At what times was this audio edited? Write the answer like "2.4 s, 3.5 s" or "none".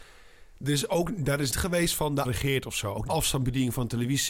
1.5 s, 2.2 s, 3.1 s